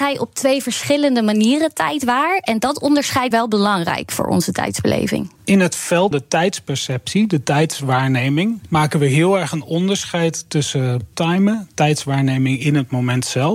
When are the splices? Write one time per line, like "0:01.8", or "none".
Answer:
0:03.3
0:05.4
0:06.1
0:11.1